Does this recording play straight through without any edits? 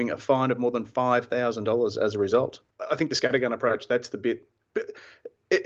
yes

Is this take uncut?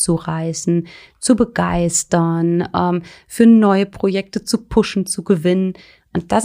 yes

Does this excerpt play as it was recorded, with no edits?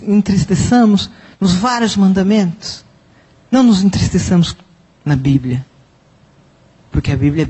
yes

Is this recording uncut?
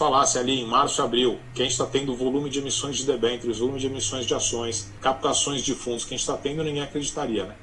yes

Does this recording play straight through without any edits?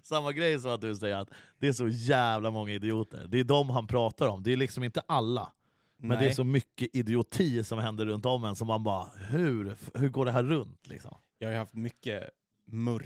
yes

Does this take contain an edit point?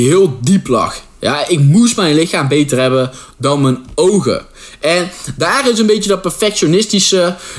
no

